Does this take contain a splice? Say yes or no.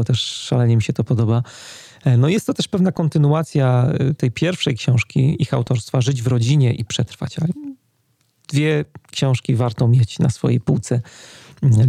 no